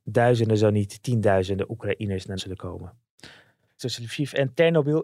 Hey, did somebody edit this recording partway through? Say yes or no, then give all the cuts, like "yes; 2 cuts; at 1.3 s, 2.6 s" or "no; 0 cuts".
yes; 2 cuts; at 2.4 s, 3.8 s